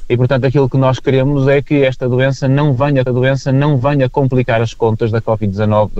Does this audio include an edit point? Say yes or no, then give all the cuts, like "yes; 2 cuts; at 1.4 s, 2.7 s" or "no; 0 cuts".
yes; 1 cut; at 3.1 s